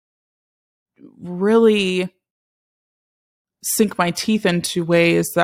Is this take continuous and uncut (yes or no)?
yes